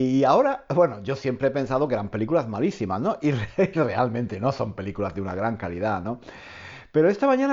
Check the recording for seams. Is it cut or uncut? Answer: uncut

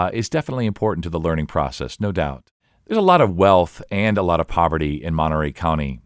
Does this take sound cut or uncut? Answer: uncut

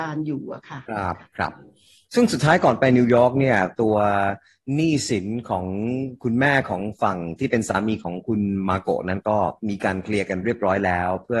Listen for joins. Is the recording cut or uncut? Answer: cut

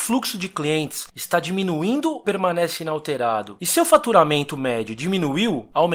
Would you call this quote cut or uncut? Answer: cut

